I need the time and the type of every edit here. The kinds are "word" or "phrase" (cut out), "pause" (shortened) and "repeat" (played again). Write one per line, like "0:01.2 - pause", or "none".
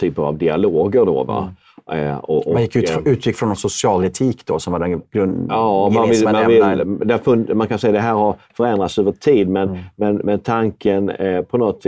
none